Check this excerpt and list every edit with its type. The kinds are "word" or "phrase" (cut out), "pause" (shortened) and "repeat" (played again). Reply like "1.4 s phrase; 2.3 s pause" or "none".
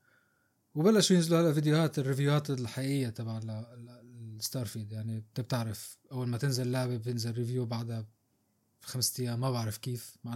none

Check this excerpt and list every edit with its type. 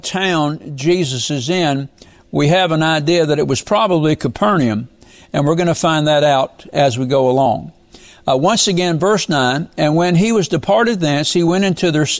none

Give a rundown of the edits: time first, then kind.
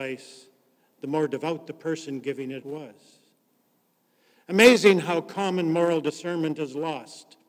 2.6 s word

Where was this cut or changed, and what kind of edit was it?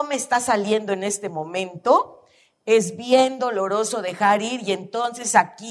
none

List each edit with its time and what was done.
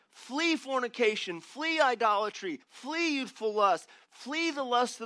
2.6 s pause

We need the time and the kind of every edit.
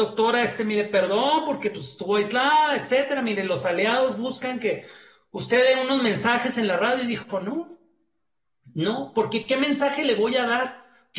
none

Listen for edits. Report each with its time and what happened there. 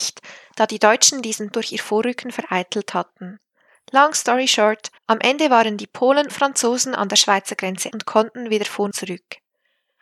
1.5 s word; 3.7 s pause; 5.0 s pause; 6.3 s word; 7.9 s word; 8.9 s word

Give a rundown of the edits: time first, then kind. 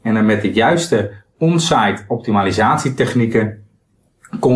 none

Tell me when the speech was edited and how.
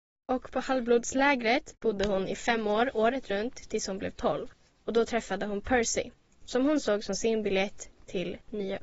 none

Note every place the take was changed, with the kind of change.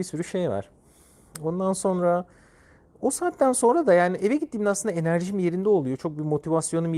none

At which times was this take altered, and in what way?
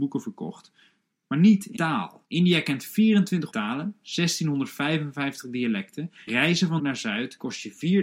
1.8 s word; 2.2 s pause; 3.5 s word; 6.3 s word; 6.8 s word

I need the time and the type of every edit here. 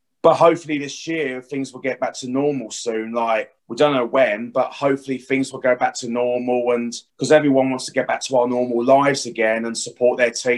3.6 s pause; 7.1 s pause

